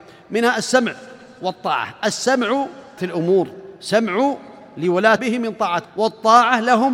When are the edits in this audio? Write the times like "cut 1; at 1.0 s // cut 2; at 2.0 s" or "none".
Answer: cut 1; at 3.0 s // cut 2; at 5.2 s // cut 3; at 5.8 s